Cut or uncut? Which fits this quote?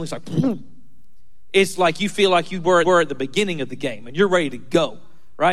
cut